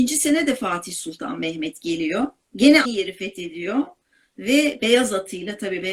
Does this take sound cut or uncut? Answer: cut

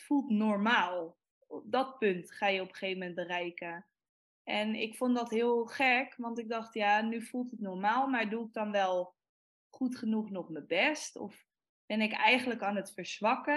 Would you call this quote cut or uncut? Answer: uncut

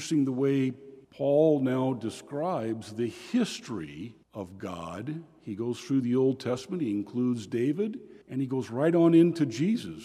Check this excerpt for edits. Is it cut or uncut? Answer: cut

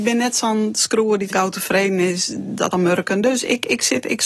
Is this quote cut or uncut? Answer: cut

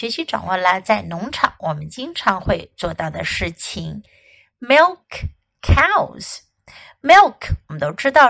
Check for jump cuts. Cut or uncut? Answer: uncut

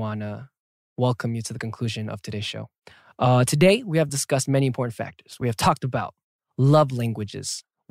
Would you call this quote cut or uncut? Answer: uncut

